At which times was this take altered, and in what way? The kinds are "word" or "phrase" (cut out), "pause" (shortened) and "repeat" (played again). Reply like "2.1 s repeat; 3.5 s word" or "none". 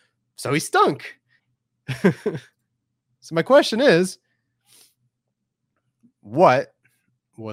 1.4 s pause